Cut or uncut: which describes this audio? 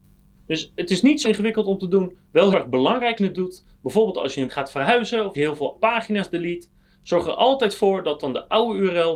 cut